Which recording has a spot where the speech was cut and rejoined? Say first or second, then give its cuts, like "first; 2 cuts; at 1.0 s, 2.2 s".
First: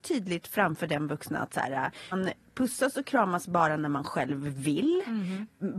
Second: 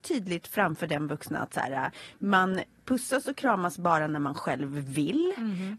first; 1 cut; at 2.1 s